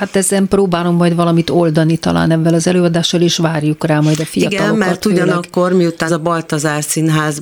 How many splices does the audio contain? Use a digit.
1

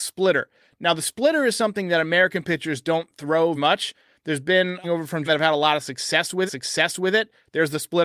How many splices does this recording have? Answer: 4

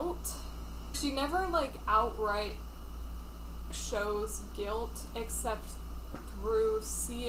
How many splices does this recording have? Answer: 2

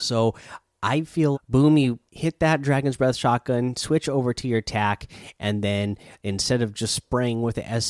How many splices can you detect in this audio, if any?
2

